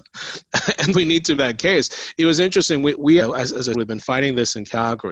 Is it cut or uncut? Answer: cut